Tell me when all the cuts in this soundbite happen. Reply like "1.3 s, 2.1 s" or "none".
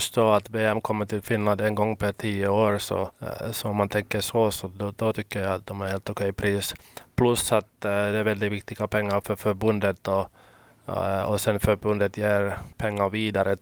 3.1 s, 12.7 s